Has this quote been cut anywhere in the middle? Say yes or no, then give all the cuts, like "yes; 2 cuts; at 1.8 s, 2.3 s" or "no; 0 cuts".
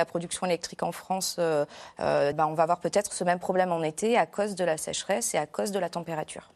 yes; 1 cut; at 2.3 s